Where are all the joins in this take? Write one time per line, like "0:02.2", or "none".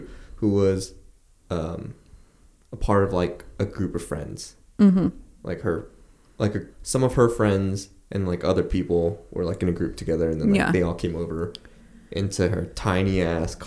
0:06.7